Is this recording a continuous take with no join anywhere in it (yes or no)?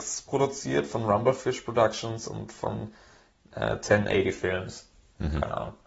yes